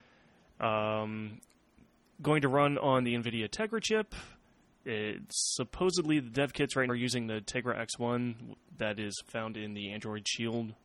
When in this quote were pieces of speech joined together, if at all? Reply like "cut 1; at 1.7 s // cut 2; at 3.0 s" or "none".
cut 1; at 6.9 s